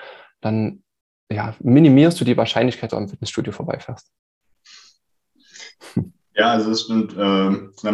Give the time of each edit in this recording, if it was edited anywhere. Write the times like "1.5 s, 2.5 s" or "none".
2.9 s